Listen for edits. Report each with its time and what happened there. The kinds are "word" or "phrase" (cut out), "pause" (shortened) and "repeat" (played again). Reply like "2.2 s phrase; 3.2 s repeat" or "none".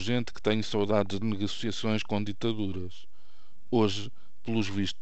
1.2 s phrase